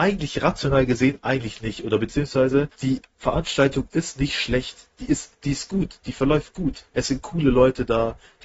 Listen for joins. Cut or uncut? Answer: cut